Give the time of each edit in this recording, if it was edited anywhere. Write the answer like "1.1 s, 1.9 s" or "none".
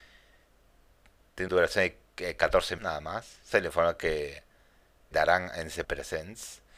1.5 s, 2.8 s, 3.5 s, 5.1 s, 5.8 s